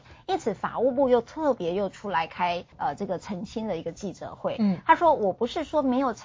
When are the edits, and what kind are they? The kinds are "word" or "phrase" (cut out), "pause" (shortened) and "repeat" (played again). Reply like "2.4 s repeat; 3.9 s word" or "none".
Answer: 2.7 s pause